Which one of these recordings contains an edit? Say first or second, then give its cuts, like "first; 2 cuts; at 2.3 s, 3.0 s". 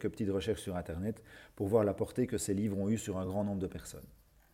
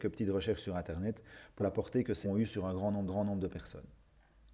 second; 3 cuts; at 1.6 s, 2.2 s, 3.1 s